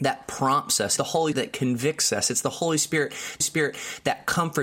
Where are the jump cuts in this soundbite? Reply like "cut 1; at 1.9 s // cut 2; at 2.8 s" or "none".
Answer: cut 1; at 1.0 s // cut 2; at 1.3 s // cut 3; at 3.4 s